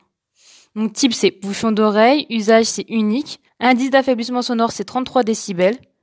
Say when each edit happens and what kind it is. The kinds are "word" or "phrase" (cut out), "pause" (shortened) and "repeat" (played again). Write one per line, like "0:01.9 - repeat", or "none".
0:03.5 - pause